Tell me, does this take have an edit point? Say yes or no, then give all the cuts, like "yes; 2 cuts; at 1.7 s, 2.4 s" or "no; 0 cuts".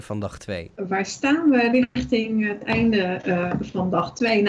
no; 0 cuts